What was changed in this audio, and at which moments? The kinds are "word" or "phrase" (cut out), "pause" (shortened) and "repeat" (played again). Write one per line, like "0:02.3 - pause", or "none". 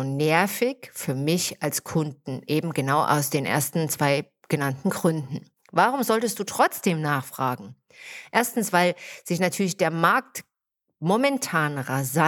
none